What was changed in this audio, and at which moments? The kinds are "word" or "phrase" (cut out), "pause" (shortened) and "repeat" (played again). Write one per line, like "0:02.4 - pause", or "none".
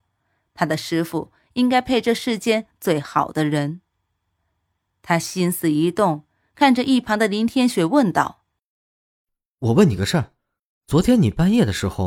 none